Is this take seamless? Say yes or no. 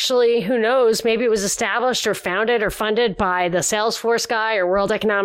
yes